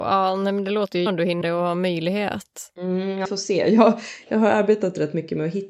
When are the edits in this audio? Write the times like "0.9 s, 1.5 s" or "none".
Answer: 1.1 s, 1.4 s, 3.2 s